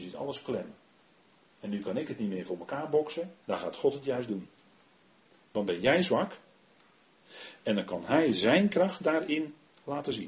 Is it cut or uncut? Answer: cut